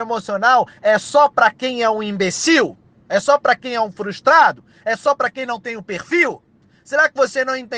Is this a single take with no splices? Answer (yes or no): yes